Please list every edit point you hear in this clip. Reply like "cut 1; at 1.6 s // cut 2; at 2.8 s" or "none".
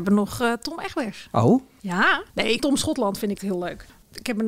cut 1; at 2.3 s // cut 2; at 2.6 s // cut 3; at 3.4 s